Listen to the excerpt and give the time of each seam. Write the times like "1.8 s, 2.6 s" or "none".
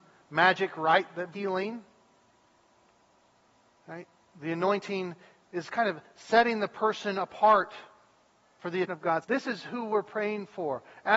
1.3 s, 8.9 s, 9.2 s